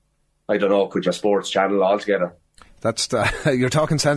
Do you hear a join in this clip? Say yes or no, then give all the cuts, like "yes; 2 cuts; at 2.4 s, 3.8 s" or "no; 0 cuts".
yes; 2 cuts; at 1.1 s, 3.1 s